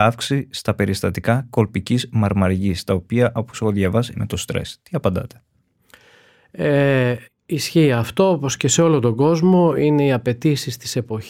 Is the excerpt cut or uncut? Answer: cut